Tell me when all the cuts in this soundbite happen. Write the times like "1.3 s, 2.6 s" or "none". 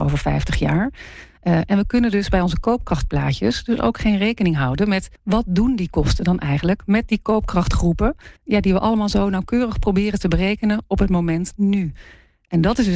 5.2 s, 8.4 s